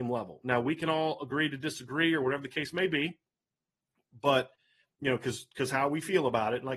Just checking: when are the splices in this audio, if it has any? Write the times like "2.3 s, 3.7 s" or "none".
none